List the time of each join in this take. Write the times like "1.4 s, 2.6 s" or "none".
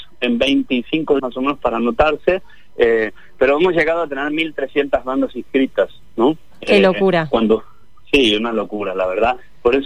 1.2 s